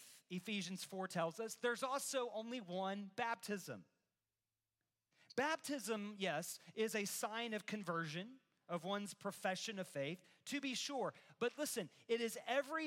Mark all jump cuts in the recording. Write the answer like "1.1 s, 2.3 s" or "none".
none